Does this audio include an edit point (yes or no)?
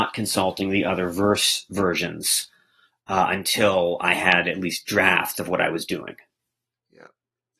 no